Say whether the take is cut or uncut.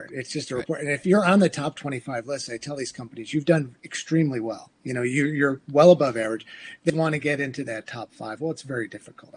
cut